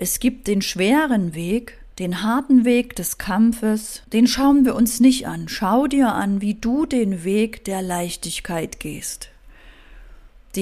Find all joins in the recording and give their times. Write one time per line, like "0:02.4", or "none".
0:01.9
0:04.0